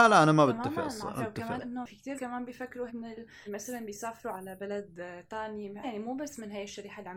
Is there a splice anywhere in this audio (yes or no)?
yes